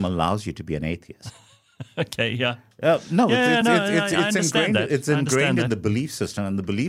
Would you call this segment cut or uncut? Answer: uncut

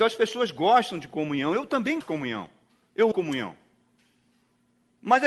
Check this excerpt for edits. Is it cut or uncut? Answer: cut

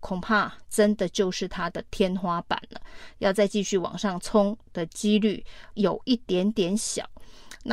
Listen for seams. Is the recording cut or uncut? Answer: cut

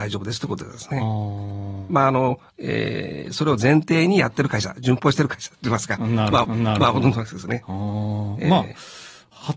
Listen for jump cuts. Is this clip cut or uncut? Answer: cut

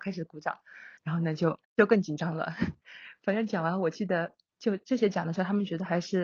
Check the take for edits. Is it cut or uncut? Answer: cut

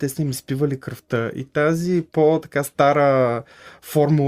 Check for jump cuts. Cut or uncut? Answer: uncut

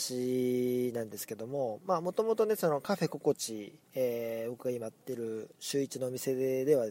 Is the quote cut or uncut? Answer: cut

